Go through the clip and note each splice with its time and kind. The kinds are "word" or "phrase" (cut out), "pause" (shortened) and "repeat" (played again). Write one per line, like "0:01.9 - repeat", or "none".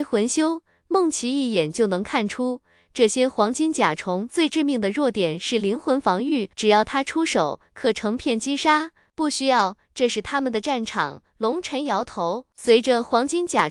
0:06.5 - pause

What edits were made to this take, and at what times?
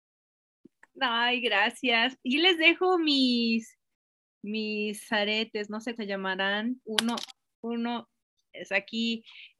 0:02.3 - word
0:05.1 - word
0:06.0 - word
0:06.8 - word
0:07.3 - word

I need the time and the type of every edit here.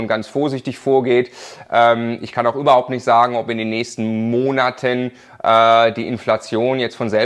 none

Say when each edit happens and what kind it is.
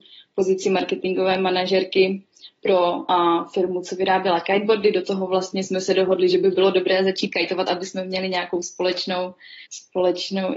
0:09.7 - pause

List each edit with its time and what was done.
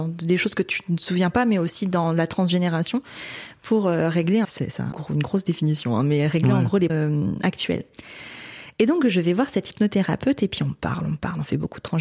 0:04.4 - phrase
0:04.9 - word
0:06.9 - word

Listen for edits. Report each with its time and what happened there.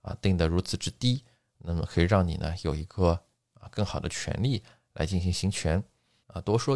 none

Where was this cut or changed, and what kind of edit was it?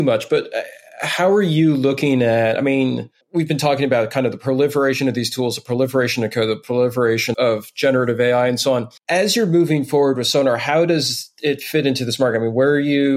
0:03.2 - pause
0:07.3 - word
0:09.0 - pause

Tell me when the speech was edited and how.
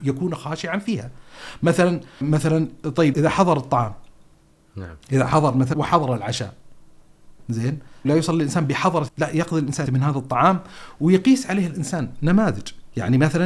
0:02.2 - word
0:03.1 - word
0:05.7 - word
0:08.0 - word
0:09.1 - word
0:09.9 - word

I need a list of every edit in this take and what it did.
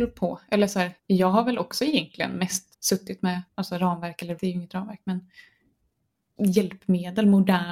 0:01.0 - pause
0:02.7 - pause
0:03.5 - pause
0:04.4 - word
0:06.4 - word

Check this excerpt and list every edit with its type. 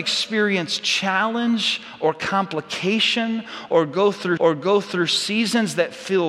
0:04.4 - repeat

